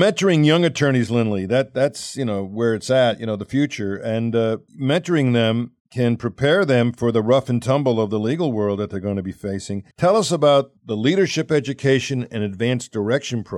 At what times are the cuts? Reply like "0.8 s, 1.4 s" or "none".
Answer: 4.7 s, 5.8 s, 9.9 s, 10.8 s